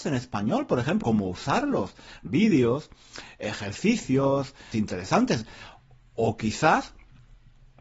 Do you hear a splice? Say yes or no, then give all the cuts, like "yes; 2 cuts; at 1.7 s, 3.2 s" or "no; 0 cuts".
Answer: yes; 3 cuts; at 1.0 s, 2.3 s, 4.7 s